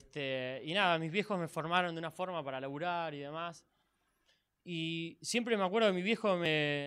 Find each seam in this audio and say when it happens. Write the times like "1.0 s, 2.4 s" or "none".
none